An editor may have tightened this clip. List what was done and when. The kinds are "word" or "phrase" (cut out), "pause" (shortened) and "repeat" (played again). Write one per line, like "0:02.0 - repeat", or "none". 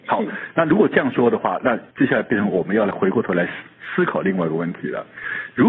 0:01.9 - pause